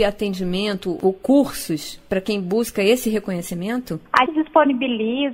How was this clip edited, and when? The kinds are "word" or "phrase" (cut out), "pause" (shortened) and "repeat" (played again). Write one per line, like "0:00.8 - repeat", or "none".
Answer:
0:04.3 - word